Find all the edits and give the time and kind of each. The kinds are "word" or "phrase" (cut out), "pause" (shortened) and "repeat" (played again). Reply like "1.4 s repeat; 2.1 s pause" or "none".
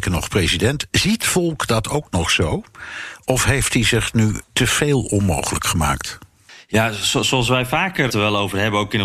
1.2 s word; 4.4 s pause; 8.1 s word